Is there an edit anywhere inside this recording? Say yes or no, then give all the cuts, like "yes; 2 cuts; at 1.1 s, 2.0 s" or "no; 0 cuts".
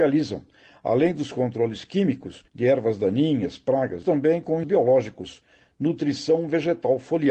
yes; 3 cuts; at 2.5 s, 4.0 s, 4.6 s